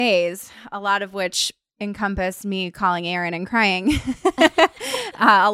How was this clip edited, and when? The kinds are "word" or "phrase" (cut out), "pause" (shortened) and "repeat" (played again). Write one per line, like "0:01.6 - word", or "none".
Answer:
none